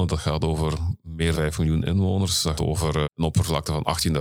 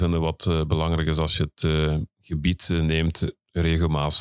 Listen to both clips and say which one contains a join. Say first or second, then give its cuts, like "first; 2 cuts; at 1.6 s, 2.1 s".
first; 3 cuts; at 1.3 s, 2.6 s, 3.0 s